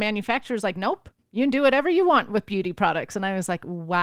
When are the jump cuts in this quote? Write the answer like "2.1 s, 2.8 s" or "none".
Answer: none